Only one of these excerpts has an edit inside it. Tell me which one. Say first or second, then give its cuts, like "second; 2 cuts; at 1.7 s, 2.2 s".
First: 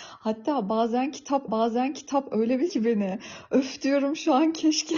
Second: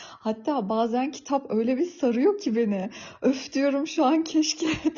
first; 2 cuts; at 1.5 s, 2.7 s